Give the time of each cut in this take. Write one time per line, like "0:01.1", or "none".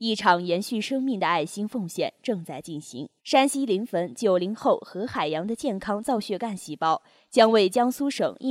0:03.2